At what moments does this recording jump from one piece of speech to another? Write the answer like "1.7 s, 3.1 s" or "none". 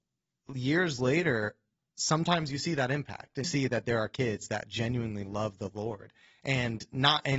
3.4 s